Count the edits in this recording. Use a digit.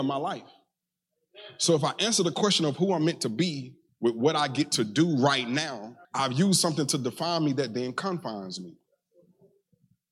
2